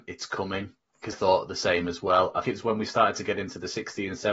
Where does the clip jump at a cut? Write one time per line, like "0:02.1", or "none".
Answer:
0:01.1
0:02.4